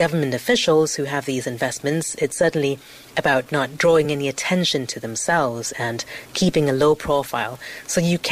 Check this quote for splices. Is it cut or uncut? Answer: uncut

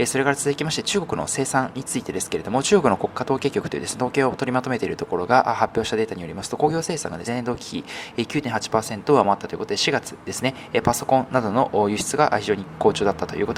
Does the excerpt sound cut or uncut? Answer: cut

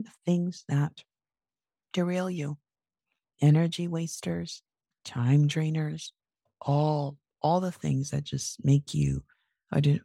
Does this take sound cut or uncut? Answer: uncut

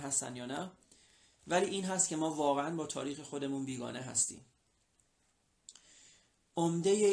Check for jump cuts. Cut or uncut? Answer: uncut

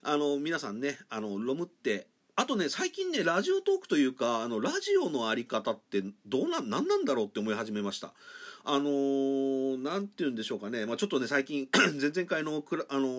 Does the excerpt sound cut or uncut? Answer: uncut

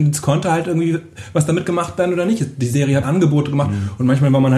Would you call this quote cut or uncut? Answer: cut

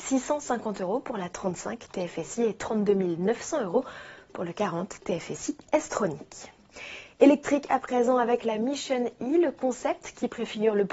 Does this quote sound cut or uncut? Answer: uncut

